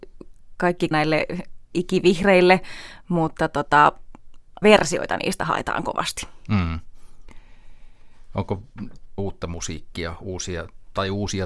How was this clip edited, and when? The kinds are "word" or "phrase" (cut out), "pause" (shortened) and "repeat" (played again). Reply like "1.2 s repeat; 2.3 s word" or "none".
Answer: 0.9 s word; 4.6 s phrase; 9.2 s phrase